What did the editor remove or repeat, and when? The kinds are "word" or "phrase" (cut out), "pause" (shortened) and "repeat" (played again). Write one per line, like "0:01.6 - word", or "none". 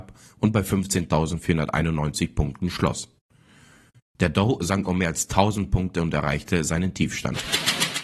none